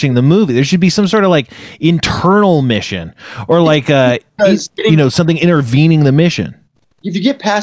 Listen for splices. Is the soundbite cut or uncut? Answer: uncut